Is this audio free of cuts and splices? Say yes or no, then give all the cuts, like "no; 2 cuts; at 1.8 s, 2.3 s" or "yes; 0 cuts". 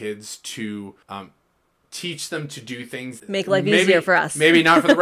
no; 2 cuts; at 1.0 s, 3.2 s